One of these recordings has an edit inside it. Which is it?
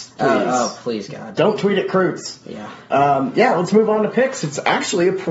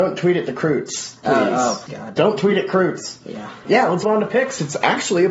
second; 3 cuts; at 1.9 s, 3.6 s, 4.0 s

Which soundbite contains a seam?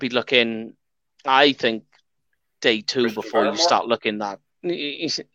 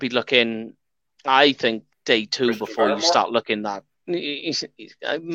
second; 1 cut; at 1.9 s

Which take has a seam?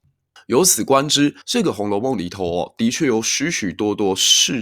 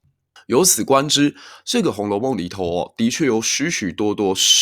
first; 1 cut; at 1.4 s

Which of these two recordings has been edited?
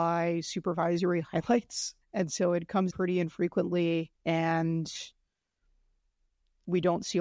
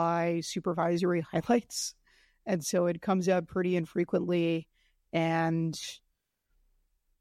first; 3 cuts; at 2.0 s, 2.9 s, 4.2 s

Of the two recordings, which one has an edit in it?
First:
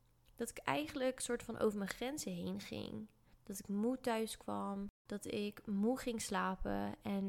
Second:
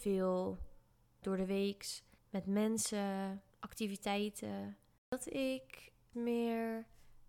second; 4 cuts; at 1.2 s, 2.2 s, 3.5 s, 6.1 s

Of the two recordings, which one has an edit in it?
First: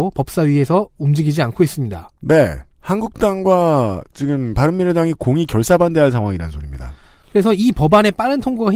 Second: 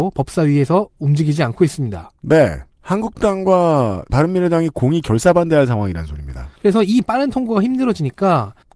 second; 3 cuts; at 4.1 s, 6.6 s, 7.0 s

